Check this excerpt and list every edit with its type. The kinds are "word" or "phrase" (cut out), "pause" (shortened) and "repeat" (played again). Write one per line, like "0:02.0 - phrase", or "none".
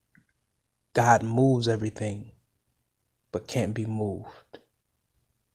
none